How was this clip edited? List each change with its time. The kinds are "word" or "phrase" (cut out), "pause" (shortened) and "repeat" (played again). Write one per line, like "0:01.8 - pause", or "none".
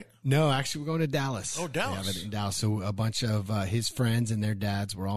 none